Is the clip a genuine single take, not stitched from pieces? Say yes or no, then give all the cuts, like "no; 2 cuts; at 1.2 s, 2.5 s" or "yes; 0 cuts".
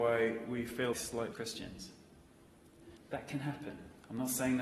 no; 3 cuts; at 0.9 s, 1.3 s, 3.0 s